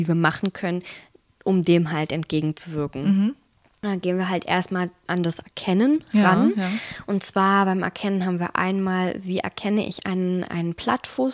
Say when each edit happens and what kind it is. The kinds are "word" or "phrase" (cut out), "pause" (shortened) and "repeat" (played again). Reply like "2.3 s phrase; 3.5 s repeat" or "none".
none